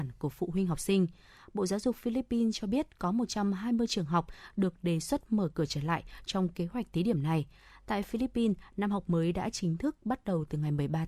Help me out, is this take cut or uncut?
uncut